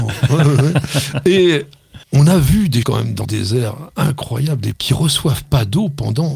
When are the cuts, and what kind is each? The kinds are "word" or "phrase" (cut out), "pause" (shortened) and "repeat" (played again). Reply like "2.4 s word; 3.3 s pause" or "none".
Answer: 2.0 s pause; 2.8 s word; 3.2 s word; 4.7 s word